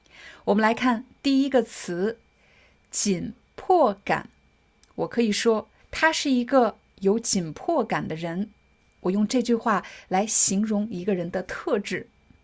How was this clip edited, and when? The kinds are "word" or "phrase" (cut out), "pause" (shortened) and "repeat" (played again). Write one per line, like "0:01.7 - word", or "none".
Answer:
0:05.8 - pause

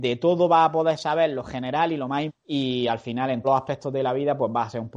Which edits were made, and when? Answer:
0:02.3 - word
0:03.4 - word

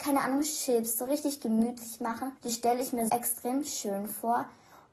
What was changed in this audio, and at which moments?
0:02.4 - pause
0:03.1 - word

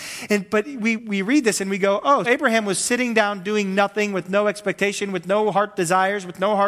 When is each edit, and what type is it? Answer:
0:01.0 - word
0:02.2 - word

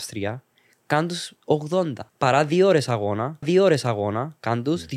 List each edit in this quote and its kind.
0:02.1 - pause
0:03.4 - repeat

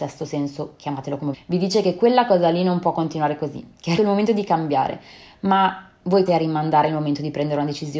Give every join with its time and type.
0:01.3 - word
0:04.0 - word
0:06.3 - word

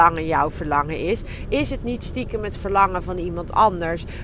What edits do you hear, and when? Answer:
none

